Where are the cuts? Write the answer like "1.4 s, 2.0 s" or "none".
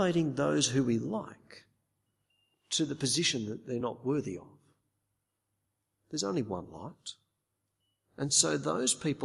none